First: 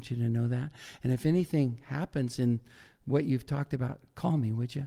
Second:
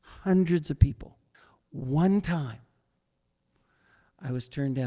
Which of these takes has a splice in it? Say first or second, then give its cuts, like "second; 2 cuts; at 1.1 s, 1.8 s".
second; 1 cut; at 1.3 s